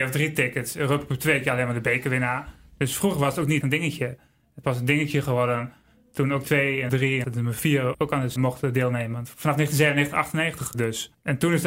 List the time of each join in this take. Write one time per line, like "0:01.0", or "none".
0:03.6
0:04.6
0:06.4
0:06.9
0:07.2
0:07.9
0:08.4
0:10.7